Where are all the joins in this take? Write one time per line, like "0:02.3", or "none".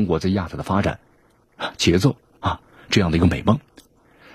none